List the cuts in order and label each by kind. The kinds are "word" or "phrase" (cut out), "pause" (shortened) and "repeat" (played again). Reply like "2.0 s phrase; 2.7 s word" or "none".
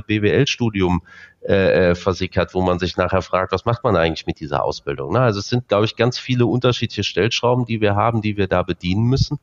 none